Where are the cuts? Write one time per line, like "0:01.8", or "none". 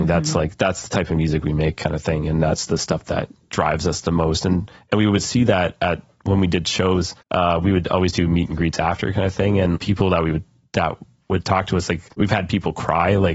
0:07.2
0:09.8
0:12.1